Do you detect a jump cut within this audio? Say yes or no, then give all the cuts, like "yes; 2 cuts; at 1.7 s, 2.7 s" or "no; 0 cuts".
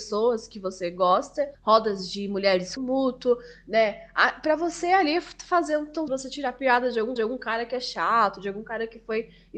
yes; 4 cuts; at 1.5 s, 2.8 s, 6.1 s, 7.2 s